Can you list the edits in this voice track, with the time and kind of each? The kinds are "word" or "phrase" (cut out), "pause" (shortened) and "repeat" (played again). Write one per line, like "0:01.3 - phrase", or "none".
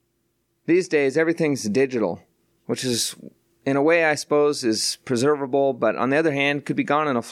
none